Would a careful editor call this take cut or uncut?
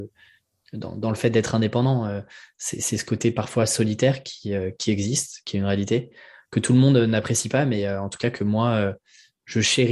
uncut